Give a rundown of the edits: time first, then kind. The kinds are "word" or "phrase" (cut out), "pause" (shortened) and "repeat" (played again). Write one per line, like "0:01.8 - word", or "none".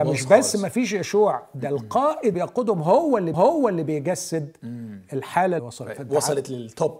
0:02.3 - word
0:03.3 - repeat
0:05.6 - phrase